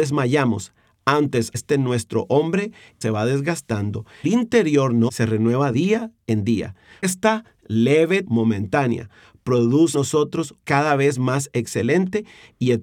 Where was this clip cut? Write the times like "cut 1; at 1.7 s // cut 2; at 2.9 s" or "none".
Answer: cut 1; at 1.5 s // cut 2; at 3.0 s // cut 3; at 4.2 s // cut 4; at 5.1 s // cut 5; at 5.7 s // cut 6; at 7.0 s // cut 7; at 8.2 s // cut 8; at 9.9 s // cut 9; at 10.6 s